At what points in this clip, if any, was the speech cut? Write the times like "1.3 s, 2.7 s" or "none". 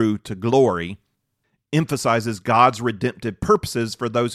none